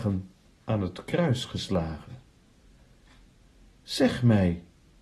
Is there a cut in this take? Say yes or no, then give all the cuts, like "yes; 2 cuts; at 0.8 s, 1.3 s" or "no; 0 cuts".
no; 0 cuts